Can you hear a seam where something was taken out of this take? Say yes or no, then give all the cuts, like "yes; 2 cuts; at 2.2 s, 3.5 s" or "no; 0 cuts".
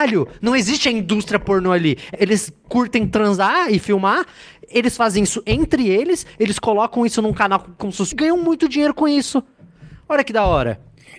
yes; 2 cuts; at 2.1 s, 8.1 s